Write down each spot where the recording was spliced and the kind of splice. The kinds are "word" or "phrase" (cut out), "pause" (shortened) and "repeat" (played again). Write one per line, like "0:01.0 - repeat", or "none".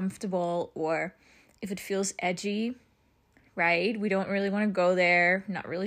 none

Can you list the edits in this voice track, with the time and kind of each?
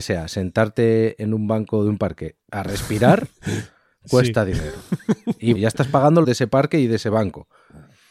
0:02.4 - pause
0:05.5 - word
0:06.2 - phrase

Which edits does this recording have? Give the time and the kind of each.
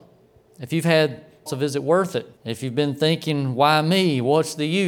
0:01.5 - word
0:02.4 - pause

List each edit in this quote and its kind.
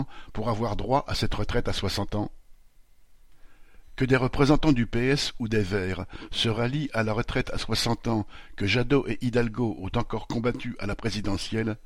none

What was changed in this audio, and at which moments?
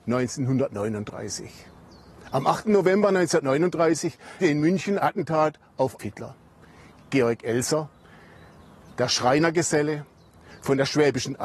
0:04.4 - word
0:05.0 - word
0:06.0 - word

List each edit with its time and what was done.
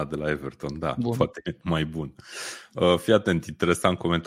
none

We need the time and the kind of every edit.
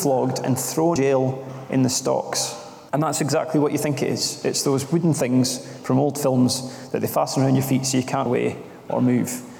0:01.0 - word
0:02.9 - pause
0:08.3 - word

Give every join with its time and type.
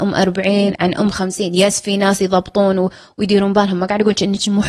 none

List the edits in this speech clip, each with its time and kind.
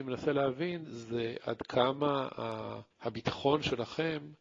0:02.9 - pause

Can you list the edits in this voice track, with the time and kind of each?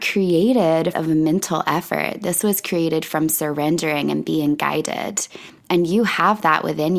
0:00.9 - phrase

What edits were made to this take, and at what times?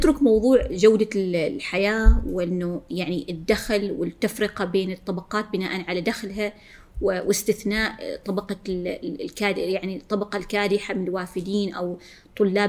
none

